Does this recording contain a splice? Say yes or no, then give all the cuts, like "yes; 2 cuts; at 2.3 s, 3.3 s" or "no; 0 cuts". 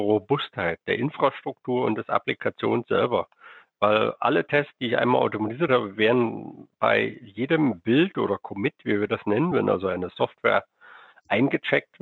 no; 0 cuts